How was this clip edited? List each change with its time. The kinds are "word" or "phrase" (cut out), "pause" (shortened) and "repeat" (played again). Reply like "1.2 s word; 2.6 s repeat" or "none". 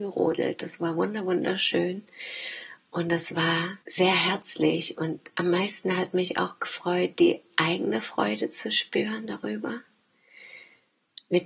3.8 s pause